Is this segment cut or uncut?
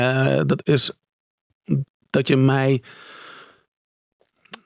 uncut